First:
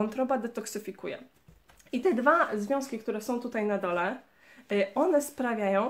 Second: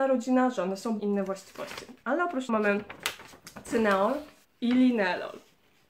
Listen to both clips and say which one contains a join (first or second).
second